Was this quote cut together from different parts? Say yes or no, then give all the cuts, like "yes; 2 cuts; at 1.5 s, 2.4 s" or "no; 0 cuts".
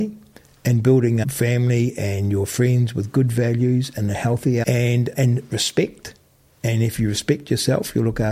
yes; 3 cuts; at 1.2 s, 4.6 s, 5.1 s